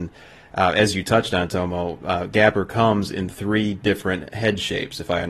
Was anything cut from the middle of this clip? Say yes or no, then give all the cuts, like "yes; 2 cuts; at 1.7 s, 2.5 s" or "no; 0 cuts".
no; 0 cuts